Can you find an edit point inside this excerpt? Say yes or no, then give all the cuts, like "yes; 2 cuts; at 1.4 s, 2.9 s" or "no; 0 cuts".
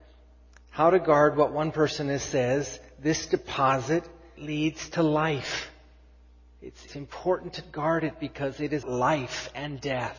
yes; 3 cuts; at 4.4 s, 6.9 s, 8.8 s